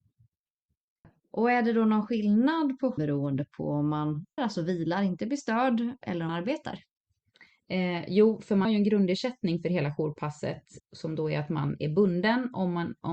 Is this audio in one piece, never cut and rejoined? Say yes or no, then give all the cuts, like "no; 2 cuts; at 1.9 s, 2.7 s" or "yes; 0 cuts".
no; 5 cuts; at 3.0 s, 4.4 s, 6.3 s, 8.6 s, 10.8 s